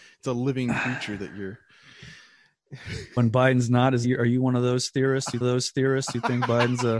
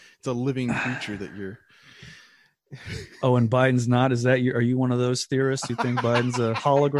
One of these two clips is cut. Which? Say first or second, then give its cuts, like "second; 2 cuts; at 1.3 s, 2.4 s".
first; 3 cuts; at 3.2 s, 4.0 s, 5.4 s